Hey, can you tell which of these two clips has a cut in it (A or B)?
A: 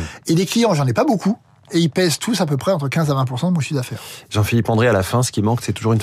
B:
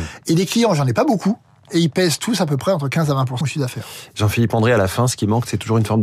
B